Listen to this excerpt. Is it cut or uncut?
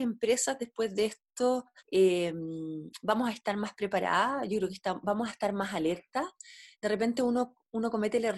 uncut